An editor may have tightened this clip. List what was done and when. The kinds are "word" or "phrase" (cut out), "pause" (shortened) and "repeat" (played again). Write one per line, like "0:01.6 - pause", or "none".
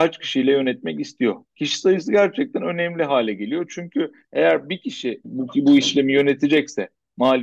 0:01.4 - pause